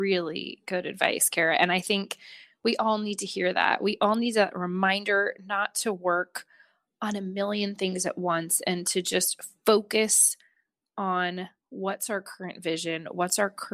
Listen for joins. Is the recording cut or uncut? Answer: uncut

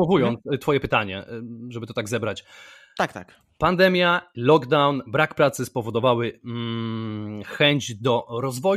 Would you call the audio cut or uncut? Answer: uncut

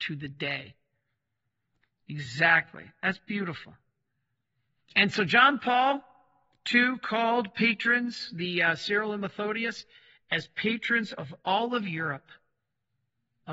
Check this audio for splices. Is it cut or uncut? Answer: uncut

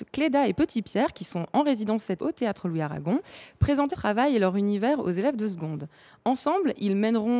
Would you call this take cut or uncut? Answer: cut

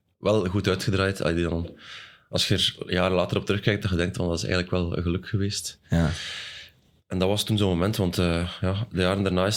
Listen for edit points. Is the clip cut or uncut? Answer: uncut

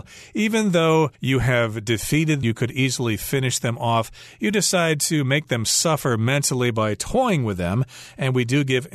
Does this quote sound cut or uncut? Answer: cut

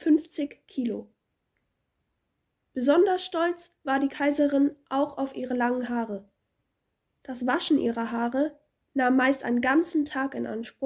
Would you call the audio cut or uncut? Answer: uncut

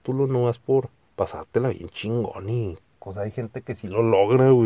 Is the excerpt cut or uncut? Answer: uncut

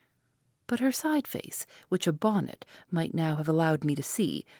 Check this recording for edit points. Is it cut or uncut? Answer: uncut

